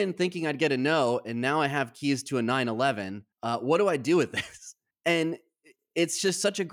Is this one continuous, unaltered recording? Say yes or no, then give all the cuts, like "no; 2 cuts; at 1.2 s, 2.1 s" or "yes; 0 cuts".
no; 2 cuts; at 3.3 s, 4.9 s